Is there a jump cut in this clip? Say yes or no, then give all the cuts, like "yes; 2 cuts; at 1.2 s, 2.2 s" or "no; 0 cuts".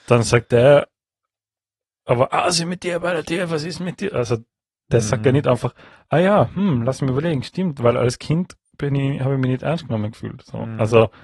no; 0 cuts